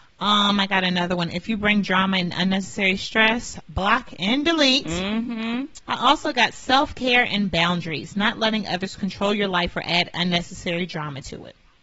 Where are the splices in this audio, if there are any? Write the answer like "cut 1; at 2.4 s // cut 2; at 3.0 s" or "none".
cut 1; at 5.8 s